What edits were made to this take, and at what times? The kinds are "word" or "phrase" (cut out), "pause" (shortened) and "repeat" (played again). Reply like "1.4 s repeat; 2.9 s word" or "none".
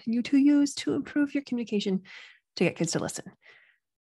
none